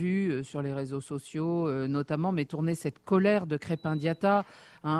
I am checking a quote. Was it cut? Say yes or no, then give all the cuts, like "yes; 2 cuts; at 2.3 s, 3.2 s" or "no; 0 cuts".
no; 0 cuts